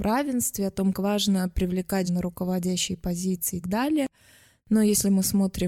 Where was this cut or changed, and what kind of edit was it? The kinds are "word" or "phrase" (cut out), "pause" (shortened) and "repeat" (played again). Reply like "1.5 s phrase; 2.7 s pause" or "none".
0.9 s word; 2.1 s word; 3.6 s word